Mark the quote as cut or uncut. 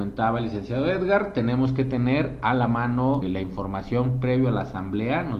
cut